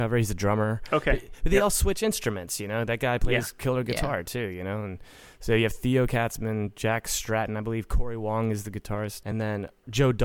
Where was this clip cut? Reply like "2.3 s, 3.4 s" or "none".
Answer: none